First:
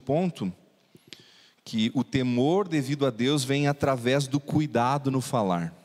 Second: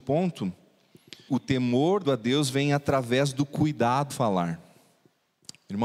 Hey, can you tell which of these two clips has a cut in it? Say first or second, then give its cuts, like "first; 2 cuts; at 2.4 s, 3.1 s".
second; 3 cuts; at 1.3 s, 2.0 s, 4.1 s